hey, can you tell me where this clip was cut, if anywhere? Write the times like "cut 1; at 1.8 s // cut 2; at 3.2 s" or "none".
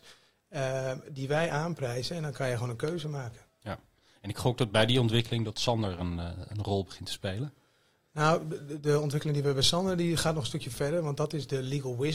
none